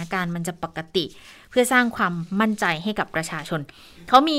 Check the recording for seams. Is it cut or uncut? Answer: uncut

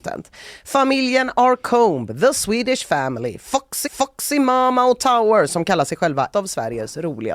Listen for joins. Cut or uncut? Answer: cut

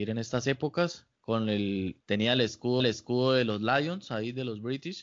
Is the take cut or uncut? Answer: cut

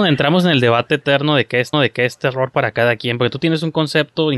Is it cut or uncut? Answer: cut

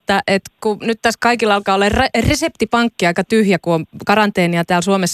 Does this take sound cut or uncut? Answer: uncut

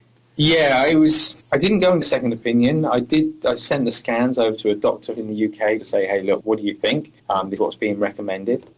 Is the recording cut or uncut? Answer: cut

